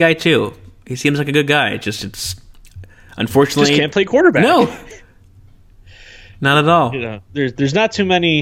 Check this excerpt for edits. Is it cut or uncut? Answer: cut